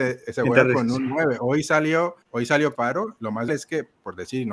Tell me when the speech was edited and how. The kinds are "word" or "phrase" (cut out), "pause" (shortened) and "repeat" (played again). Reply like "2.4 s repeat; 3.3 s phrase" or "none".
2.2 s pause; 2.7 s phrase; 3.5 s word